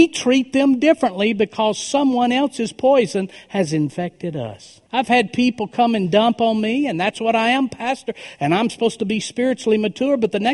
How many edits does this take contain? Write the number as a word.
one